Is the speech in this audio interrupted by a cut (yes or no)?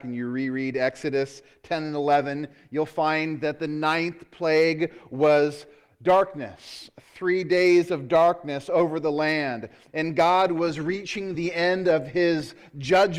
no